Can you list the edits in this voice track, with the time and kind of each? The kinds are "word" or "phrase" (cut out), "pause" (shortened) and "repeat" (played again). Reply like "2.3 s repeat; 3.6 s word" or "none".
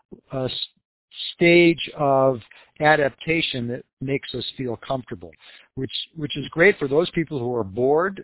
none